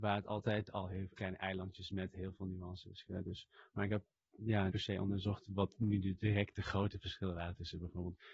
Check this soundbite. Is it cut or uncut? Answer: cut